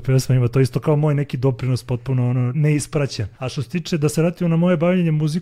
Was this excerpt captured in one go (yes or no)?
no